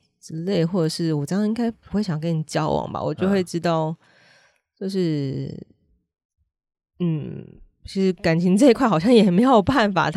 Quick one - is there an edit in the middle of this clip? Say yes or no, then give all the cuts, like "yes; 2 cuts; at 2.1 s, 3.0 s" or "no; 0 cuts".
no; 0 cuts